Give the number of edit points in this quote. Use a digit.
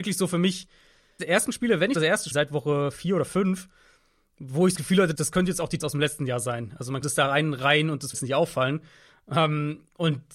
8